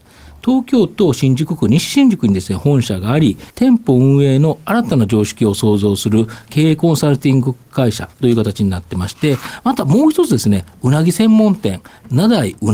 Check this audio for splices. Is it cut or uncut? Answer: cut